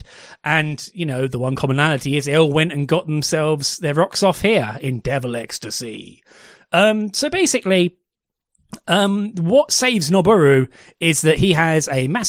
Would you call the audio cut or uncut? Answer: uncut